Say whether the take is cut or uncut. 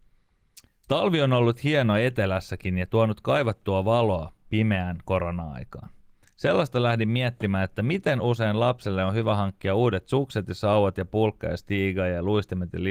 uncut